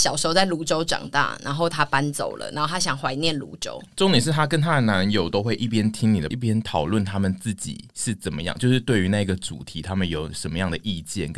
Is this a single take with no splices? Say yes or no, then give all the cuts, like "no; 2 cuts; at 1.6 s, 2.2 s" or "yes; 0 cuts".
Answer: no; 1 cut; at 6.3 s